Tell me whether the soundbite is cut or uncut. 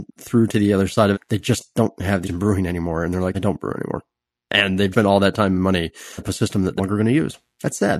cut